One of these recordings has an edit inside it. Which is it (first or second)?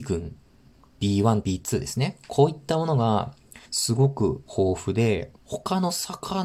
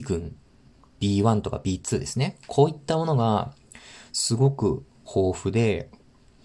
first